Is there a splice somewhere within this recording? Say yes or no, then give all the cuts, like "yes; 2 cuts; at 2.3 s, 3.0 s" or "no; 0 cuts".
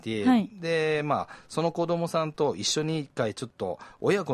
no; 0 cuts